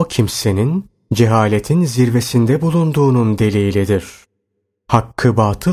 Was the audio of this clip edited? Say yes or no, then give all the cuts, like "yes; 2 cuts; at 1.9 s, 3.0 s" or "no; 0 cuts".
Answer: no; 0 cuts